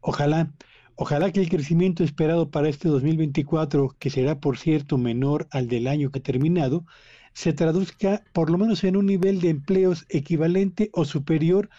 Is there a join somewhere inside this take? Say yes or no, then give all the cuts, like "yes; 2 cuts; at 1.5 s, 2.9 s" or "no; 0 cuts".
yes; 1 cut; at 6.1 s